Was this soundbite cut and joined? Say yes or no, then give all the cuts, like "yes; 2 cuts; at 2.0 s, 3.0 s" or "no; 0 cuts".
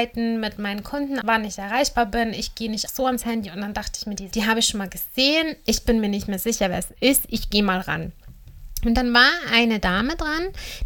yes; 3 cuts; at 1.2 s, 2.9 s, 4.3 s